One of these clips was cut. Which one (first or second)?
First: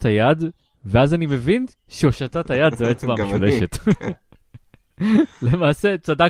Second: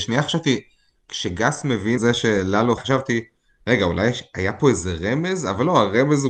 second